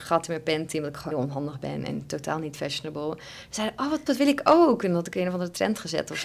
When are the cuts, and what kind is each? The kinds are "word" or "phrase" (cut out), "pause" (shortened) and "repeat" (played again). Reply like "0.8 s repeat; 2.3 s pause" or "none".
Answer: 1.1 s word; 4.1 s word